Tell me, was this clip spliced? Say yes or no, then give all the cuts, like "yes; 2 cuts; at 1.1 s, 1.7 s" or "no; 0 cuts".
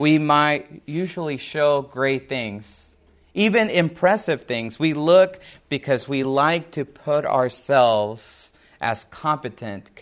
no; 0 cuts